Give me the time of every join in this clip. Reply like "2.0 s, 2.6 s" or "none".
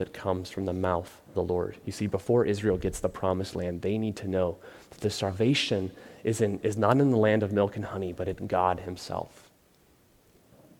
1.3 s